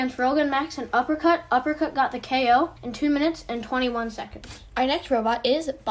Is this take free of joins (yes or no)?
no